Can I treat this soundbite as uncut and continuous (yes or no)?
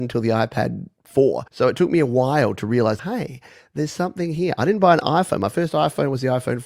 no